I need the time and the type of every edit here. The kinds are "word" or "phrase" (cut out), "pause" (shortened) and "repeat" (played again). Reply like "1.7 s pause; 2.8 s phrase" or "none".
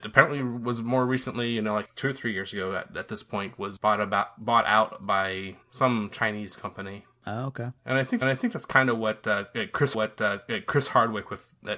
1.9 s phrase; 3.8 s word; 5.6 s pause; 7.8 s pause; 8.2 s repeat; 9.9 s repeat